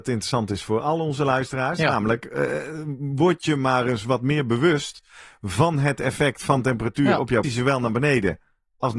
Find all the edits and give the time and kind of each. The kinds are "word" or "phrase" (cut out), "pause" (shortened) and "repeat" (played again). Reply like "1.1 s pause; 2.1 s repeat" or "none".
7.4 s word